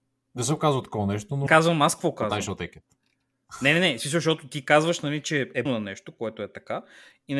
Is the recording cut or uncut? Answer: cut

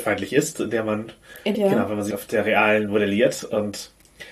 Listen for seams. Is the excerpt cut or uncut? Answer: cut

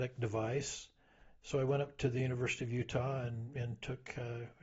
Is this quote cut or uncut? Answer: uncut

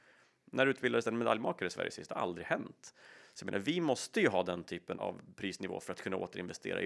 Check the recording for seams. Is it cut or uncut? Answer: cut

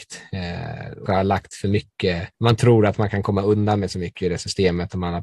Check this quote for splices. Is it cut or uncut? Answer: cut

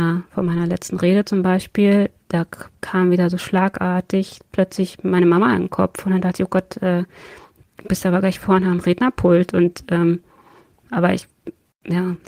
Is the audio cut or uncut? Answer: uncut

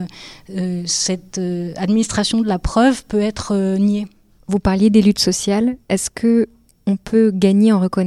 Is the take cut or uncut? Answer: cut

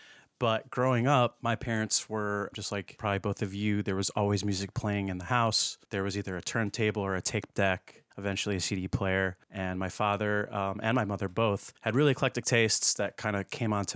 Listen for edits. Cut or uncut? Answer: cut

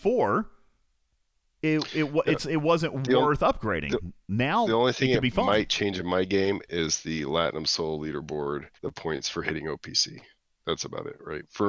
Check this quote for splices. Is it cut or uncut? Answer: cut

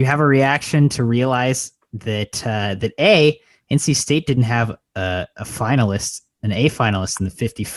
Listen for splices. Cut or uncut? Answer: uncut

